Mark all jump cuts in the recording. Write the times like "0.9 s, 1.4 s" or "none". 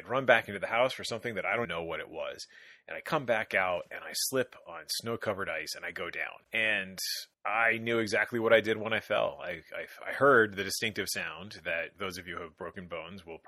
1.6 s, 7.3 s